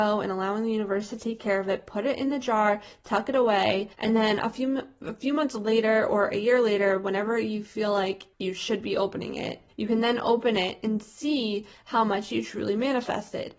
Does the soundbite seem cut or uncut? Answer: cut